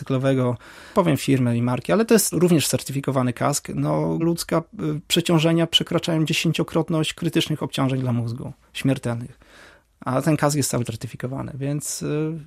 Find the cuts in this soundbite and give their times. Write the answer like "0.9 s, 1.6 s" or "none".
0.9 s, 2.3 s, 4.2 s, 10.9 s